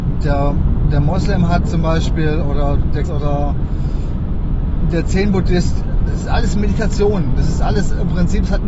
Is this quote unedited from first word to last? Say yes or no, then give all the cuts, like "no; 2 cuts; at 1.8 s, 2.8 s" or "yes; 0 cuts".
no; 2 cuts; at 3.0 s, 6.1 s